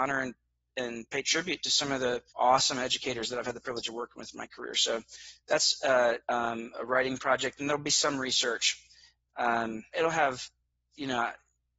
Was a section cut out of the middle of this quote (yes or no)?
yes